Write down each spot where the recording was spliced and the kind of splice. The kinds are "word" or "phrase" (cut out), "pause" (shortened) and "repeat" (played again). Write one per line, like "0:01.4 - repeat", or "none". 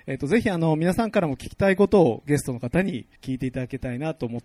0:03.2 - pause